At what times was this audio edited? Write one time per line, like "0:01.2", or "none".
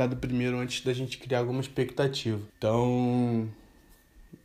0:02.5